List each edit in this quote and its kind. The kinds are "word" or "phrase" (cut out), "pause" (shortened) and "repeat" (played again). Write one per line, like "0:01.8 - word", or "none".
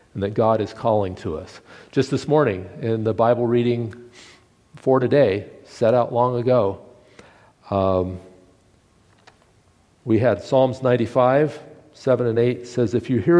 none